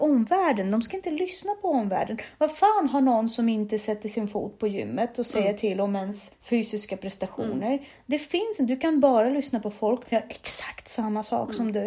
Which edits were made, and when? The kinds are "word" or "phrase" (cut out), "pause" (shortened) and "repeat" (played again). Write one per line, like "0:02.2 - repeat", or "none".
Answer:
0:06.3 - pause
0:10.1 - word